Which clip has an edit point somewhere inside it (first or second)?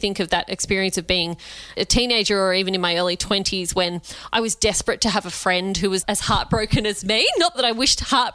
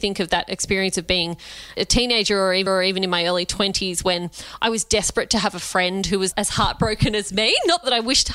second